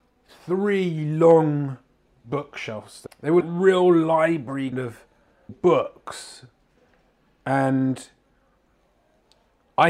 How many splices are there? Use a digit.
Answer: 5